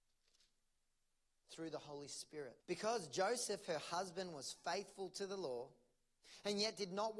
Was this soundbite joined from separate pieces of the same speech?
yes; 1 cut; at 2.6 s

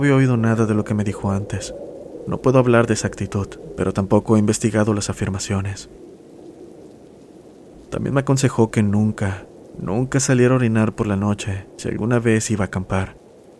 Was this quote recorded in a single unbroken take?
yes; 0 cuts

